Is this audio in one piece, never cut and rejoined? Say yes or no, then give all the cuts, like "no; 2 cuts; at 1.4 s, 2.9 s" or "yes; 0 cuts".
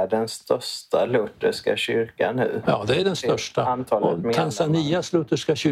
yes; 0 cuts